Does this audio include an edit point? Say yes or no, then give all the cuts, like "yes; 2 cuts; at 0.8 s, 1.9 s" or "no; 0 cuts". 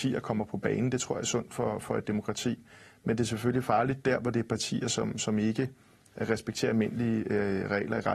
no; 0 cuts